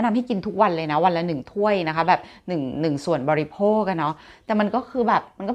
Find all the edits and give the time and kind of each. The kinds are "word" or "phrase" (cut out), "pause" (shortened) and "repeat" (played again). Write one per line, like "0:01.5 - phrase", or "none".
none